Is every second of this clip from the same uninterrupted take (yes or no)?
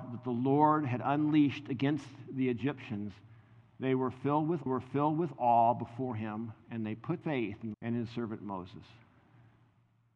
no